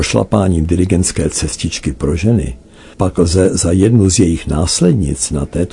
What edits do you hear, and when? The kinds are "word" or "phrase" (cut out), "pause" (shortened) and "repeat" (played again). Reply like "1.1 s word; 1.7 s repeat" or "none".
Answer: 2.9 s pause